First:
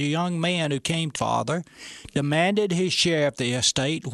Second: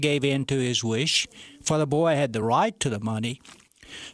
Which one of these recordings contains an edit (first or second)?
first